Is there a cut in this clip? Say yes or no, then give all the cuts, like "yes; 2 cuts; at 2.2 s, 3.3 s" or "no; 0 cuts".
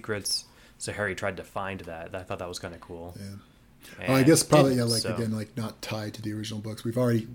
no; 0 cuts